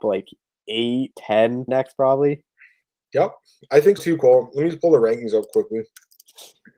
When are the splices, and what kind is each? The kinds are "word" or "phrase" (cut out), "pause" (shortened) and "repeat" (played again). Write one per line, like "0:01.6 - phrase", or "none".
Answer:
0:01.1 - word
0:01.7 - word
0:04.0 - word

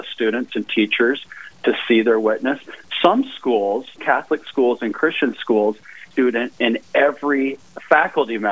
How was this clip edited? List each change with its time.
0:04.0 - word
0:06.1 - word

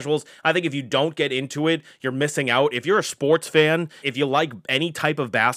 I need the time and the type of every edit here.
0:04.0 - phrase

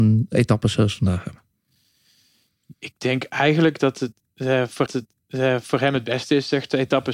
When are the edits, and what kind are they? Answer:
0:04.9 - repeat

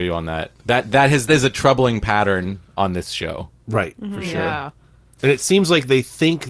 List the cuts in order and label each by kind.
0:01.3 - word

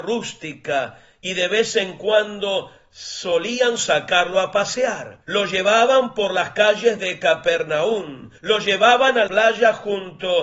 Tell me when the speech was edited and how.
0:05.2 - pause
0:08.4 - pause
0:09.3 - word

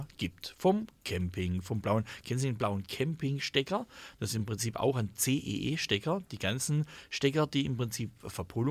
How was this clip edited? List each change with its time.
none

